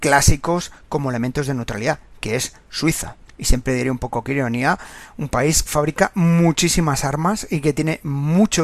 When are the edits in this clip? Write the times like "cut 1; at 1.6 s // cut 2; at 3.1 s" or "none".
cut 1; at 3.3 s // cut 2; at 5.7 s